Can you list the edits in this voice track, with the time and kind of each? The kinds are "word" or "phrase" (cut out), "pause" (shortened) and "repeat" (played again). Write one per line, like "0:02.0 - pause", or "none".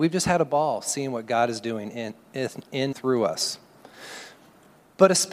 0:02.9 - word